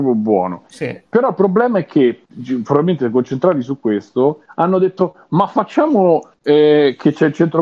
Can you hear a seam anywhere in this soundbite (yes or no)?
no